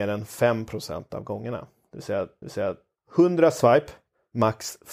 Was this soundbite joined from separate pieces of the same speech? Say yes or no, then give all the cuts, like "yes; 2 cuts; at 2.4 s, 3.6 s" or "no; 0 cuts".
yes; 1 cut; at 2.4 s